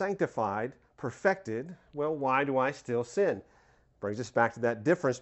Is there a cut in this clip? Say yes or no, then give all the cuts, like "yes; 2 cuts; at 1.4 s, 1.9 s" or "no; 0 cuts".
no; 0 cuts